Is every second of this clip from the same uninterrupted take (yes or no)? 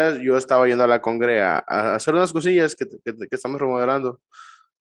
yes